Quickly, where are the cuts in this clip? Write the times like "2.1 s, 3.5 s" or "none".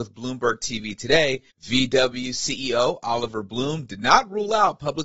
1.5 s